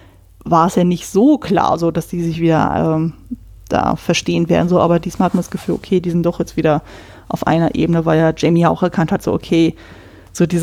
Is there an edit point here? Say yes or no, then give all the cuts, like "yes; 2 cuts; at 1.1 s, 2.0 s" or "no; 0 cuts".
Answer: no; 0 cuts